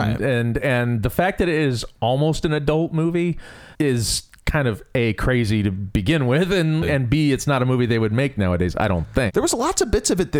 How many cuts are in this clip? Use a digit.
2